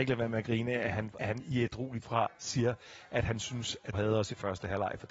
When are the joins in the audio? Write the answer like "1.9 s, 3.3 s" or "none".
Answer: 1.2 s, 2.0 s, 3.9 s